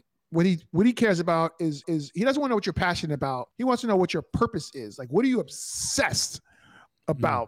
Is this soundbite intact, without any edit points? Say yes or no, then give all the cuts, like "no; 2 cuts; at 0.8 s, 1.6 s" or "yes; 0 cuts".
no; 2 cuts; at 1.8 s, 3.5 s